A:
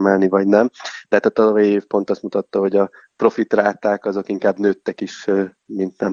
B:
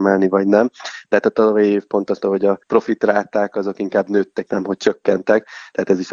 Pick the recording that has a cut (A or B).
B